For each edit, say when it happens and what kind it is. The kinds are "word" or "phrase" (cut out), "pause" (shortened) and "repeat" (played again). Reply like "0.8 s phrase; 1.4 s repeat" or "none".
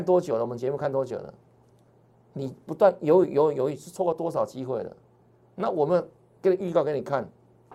none